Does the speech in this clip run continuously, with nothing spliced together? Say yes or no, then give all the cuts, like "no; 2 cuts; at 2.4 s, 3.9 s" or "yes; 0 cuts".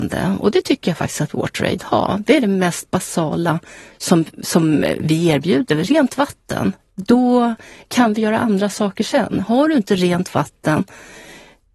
yes; 0 cuts